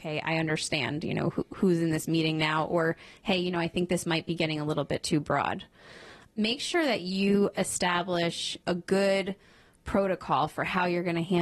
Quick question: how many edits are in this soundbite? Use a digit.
0